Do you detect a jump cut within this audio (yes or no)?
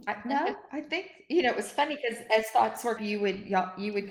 yes